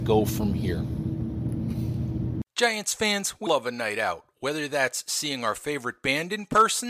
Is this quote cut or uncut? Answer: cut